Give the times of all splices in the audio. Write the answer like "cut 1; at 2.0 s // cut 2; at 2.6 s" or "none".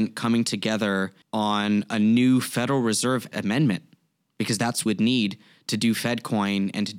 cut 1; at 1.2 s // cut 2; at 3.3 s // cut 3; at 4.9 s